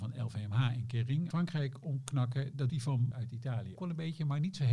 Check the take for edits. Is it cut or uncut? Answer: cut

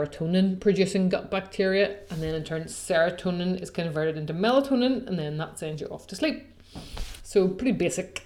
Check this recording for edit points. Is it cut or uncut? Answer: uncut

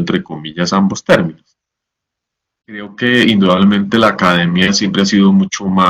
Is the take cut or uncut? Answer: uncut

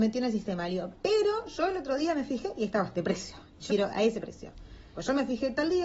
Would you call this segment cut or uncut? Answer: cut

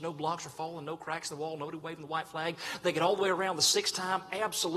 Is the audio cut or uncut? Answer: uncut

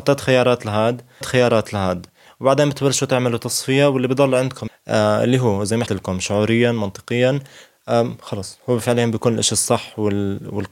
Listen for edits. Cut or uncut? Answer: cut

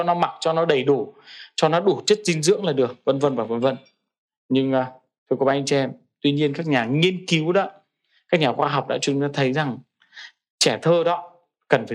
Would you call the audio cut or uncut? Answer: uncut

